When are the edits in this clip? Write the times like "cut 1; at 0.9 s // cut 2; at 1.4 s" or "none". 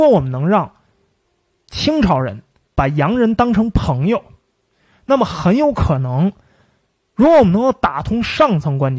none